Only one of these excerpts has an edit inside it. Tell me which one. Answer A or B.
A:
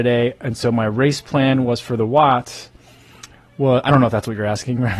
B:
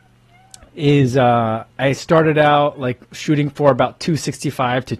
B